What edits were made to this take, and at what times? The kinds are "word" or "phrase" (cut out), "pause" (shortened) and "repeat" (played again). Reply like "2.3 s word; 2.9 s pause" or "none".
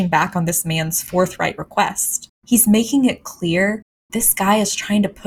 2.4 s pause; 4.1 s word